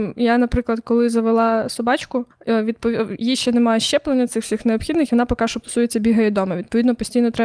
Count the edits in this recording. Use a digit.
2